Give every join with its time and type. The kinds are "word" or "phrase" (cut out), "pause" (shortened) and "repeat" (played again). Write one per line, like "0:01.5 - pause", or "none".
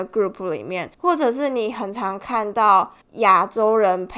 0:00.9 - pause
0:03.0 - pause